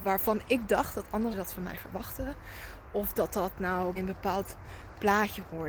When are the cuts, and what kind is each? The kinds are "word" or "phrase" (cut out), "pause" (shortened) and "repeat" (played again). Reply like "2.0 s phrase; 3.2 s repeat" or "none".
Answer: 1.3 s word; 3.9 s word